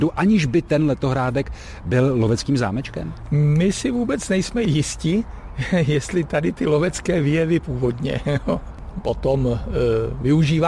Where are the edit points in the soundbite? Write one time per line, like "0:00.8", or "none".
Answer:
0:07.6